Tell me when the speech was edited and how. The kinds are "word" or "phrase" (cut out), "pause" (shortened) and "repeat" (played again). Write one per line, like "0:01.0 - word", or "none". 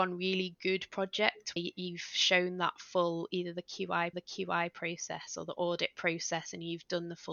0:01.6 - word
0:04.1 - repeat